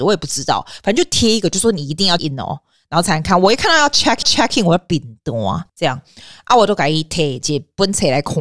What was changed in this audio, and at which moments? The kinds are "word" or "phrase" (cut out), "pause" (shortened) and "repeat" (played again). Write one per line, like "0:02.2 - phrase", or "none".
0:02.2 - word
0:04.2 - repeat
0:05.7 - pause